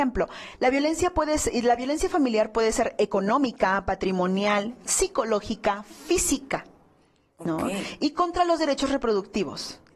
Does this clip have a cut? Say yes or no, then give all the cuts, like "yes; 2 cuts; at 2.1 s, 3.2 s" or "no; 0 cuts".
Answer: no; 0 cuts